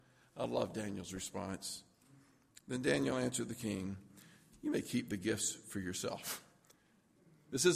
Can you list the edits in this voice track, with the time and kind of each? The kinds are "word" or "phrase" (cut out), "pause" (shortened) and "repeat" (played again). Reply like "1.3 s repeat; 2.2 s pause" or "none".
none